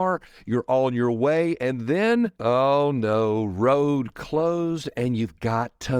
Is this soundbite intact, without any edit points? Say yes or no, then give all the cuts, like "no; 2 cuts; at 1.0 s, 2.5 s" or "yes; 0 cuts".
no; 1 cut; at 2.4 s